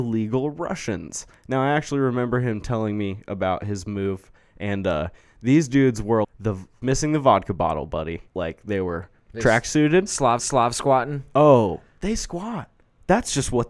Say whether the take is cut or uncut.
cut